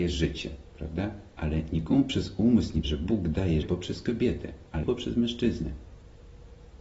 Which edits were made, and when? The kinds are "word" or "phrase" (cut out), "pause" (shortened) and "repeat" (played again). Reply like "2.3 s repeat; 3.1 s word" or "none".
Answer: 1.3 s pause; 2.8 s word; 3.6 s word; 4.8 s word